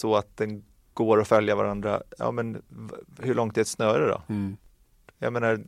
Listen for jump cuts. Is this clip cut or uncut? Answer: uncut